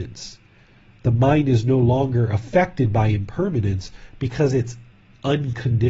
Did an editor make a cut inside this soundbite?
no; 0 cuts

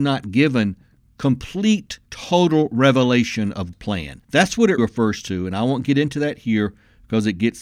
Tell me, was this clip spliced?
yes; 4 cuts; at 2.1 s, 3.7 s, 4.2 s, 4.8 s

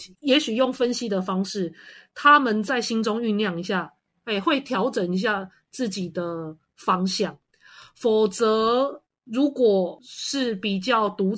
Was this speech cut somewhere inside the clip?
no; 0 cuts

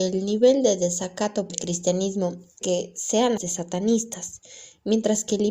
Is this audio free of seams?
no; 3 cuts; at 1.5 s, 2.6 s, 3.4 s

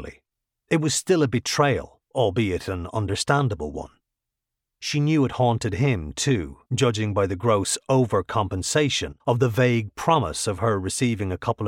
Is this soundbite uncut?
no; 3 cuts; at 2.0 s, 6.7 s, 9.2 s

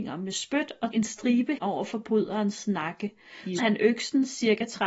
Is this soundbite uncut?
no; 3 cuts; at 0.9 s, 1.6 s, 3.6 s

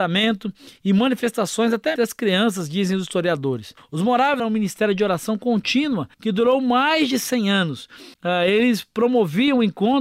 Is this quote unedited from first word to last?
no; 5 cuts; at 2.0 s, 3.8 s, 4.4 s, 6.1 s, 8.1 s

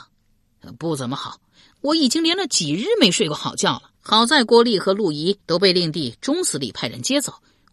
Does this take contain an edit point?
yes; 2 cuts; at 3.9 s, 5.4 s

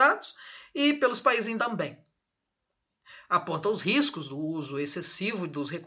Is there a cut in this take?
yes; 1 cut; at 1.6 s

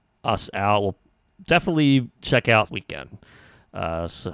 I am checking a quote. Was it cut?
yes; 2 cuts; at 2.1 s, 2.7 s

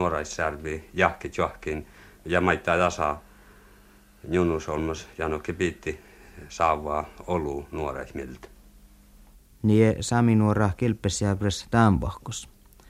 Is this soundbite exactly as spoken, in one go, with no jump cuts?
yes; 0 cuts

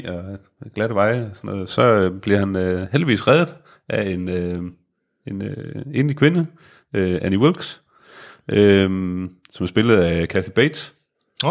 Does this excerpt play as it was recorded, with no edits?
yes; 0 cuts

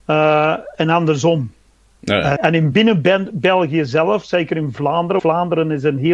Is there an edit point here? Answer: yes; 3 cuts; at 2.4 s, 2.7 s, 5.2 s

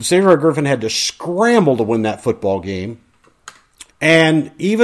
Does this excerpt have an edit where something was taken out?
yes; 1 cut; at 3.9 s

